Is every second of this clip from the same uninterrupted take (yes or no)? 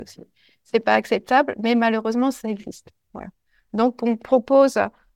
yes